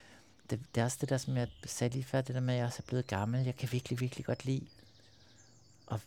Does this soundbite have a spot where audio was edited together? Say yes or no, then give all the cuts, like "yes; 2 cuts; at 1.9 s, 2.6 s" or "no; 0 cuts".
no; 0 cuts